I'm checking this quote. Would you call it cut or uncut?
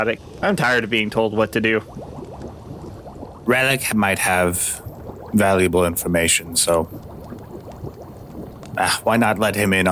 uncut